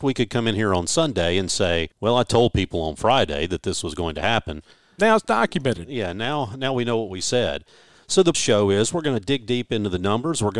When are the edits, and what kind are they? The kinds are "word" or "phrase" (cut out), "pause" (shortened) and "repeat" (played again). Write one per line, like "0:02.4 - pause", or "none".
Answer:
0:01.9 - pause
0:08.3 - phrase